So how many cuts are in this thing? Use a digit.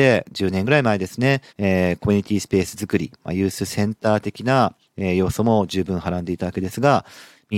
1